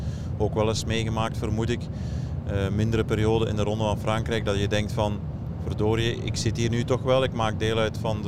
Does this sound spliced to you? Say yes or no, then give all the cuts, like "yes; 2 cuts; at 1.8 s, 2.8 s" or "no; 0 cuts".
no; 0 cuts